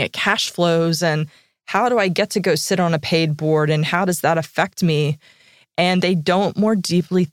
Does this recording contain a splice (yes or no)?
no